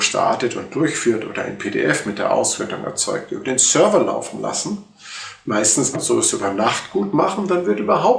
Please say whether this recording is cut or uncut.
cut